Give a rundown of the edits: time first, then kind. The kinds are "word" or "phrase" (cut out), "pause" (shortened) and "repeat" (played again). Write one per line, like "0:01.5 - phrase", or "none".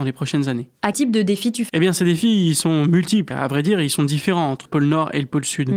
0:00.9 - word
0:01.7 - word
0:03.3 - word
0:04.7 - word